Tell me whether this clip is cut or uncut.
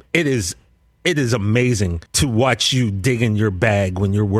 cut